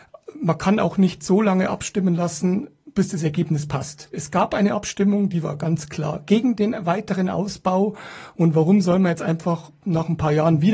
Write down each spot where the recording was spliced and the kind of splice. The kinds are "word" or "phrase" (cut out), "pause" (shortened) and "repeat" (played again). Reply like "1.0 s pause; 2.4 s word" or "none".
none

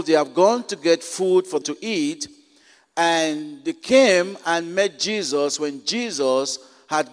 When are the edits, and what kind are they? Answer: 1.6 s word

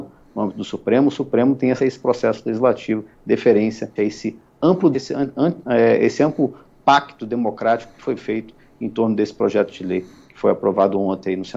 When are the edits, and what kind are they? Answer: 1.8 s word; 4.0 s word; 4.9 s word

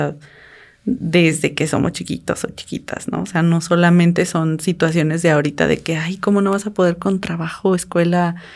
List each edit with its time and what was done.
none

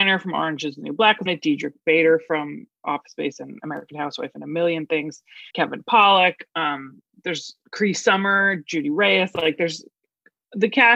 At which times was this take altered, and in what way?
1.3 s word; 5.5 s pause; 7.6 s pause

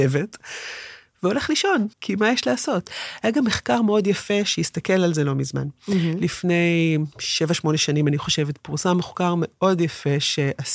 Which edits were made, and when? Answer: 1.9 s pause; 7.1 s pause

